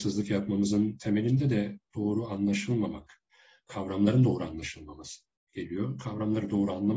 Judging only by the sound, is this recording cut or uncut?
uncut